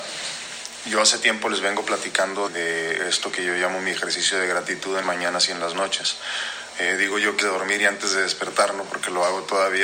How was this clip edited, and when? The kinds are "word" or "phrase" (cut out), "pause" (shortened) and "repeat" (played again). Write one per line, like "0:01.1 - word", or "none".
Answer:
0:02.5 - word
0:05.0 - word
0:07.4 - word